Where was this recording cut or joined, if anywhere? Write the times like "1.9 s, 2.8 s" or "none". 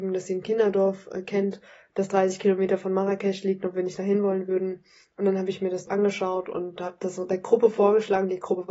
none